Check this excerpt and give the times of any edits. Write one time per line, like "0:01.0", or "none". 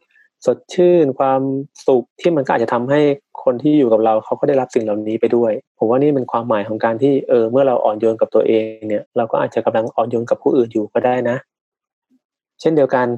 0:02.1
0:05.7
0:09.1